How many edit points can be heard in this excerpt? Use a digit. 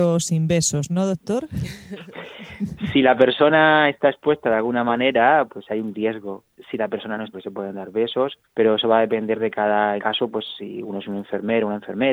3